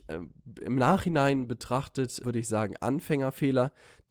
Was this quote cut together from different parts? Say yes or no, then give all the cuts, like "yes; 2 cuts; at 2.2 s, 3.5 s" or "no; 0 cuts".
yes; 1 cut; at 2.2 s